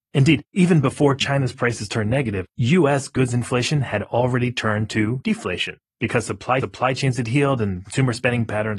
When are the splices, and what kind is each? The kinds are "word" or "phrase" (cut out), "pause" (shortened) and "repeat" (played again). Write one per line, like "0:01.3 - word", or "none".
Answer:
0:06.6 - repeat